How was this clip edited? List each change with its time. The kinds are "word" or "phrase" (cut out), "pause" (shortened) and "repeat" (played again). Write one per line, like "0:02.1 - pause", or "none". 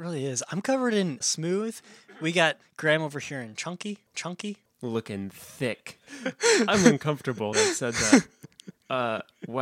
0:01.2 - word
0:02.6 - word
0:04.1 - repeat
0:07.5 - word